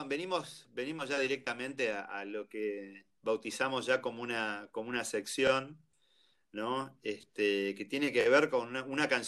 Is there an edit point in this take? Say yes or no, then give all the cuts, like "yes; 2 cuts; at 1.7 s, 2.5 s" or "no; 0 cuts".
no; 0 cuts